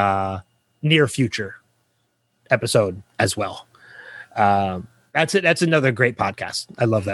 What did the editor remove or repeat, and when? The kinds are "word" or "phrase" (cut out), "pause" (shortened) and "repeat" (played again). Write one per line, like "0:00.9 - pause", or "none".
none